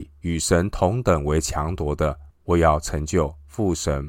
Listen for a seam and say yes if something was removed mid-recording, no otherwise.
yes